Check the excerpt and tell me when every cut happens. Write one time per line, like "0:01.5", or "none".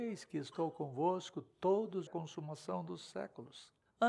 0:02.1

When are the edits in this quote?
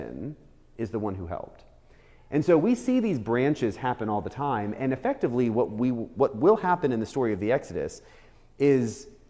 none

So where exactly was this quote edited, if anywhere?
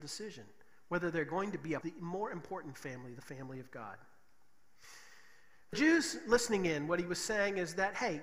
0:01.8
0:05.7

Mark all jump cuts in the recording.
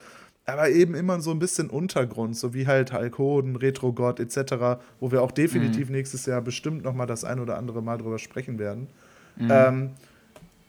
none

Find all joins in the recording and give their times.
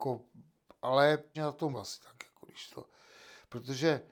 0:01.3
0:01.7
0:02.7

